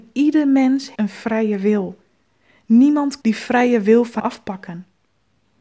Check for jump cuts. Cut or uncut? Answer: cut